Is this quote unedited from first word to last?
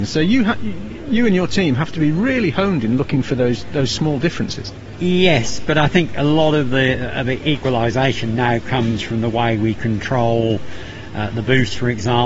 yes; 0 cuts

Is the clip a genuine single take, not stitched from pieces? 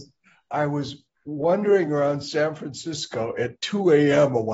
yes; 0 cuts

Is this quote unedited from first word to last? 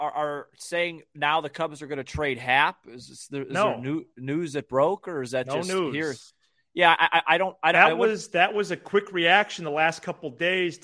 yes; 0 cuts

